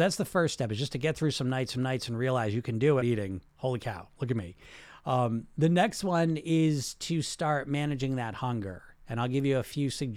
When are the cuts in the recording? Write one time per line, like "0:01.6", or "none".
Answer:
0:01.8
0:03.0

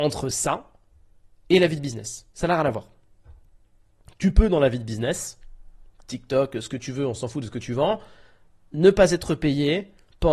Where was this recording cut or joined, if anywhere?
0:02.3

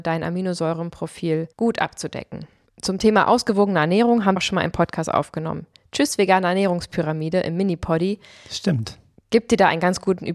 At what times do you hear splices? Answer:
0:04.4

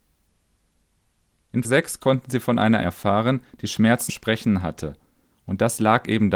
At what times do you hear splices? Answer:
0:01.6
0:02.8
0:04.1

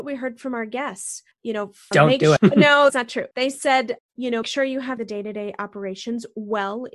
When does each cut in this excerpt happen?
0:01.3
0:01.9
0:02.4
0:02.9
0:03.3
0:04.0
0:04.4
0:05.0

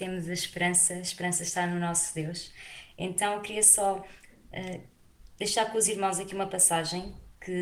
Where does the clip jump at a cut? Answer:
none

